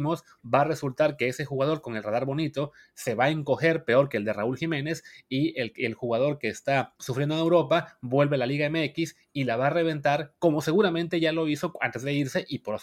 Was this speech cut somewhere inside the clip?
yes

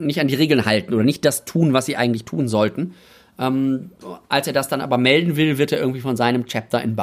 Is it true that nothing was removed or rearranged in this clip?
yes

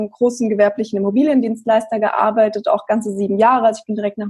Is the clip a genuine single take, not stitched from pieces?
yes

